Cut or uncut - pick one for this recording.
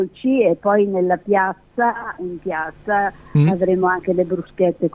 uncut